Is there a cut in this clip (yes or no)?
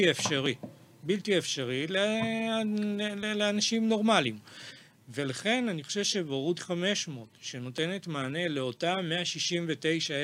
no